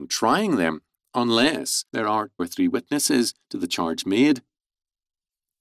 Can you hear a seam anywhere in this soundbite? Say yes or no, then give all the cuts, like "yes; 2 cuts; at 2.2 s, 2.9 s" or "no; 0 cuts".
yes; 2 cuts; at 1.9 s, 2.4 s